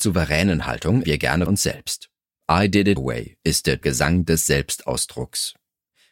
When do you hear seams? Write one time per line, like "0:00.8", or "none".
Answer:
0:01.0
0:01.5
0:03.0
0:03.8

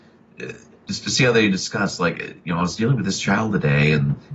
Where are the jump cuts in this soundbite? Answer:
none

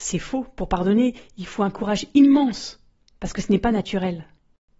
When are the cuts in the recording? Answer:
none

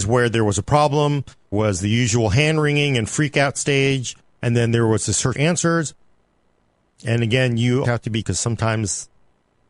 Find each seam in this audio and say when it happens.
0:01.5
0:05.3
0:07.8
0:08.2

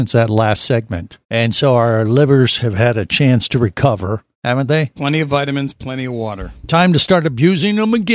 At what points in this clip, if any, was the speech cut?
0:01.2
0:04.3

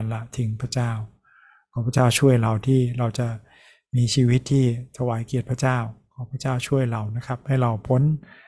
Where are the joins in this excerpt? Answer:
none

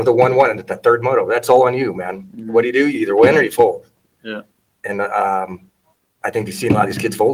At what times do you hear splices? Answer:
none

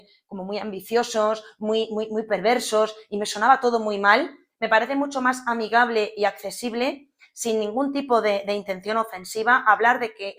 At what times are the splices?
none

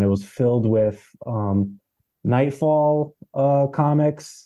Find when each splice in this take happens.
none

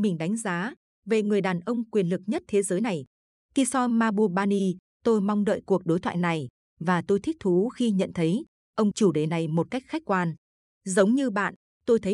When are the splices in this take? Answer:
0:08.9

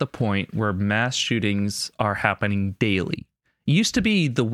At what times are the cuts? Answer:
none

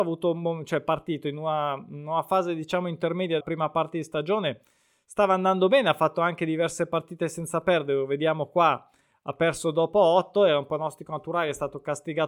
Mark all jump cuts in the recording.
0:03.4

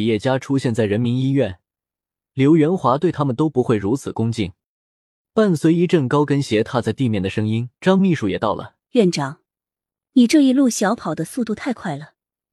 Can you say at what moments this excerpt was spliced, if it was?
0:07.8
0:08.8

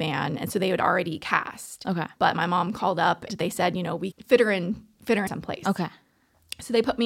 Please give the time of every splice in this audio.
0:03.3
0:04.1
0:05.3

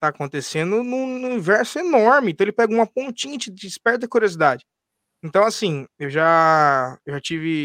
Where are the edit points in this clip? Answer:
none

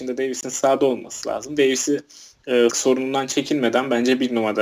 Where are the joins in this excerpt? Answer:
0:02.7

